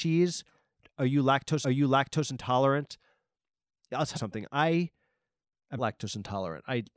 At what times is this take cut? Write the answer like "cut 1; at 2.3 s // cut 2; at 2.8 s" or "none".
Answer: cut 1; at 1.6 s // cut 2; at 4.2 s // cut 3; at 5.8 s